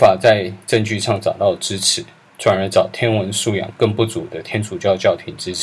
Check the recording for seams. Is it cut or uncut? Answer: uncut